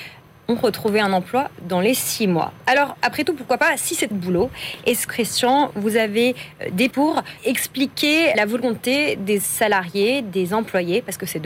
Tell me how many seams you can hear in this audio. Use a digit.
5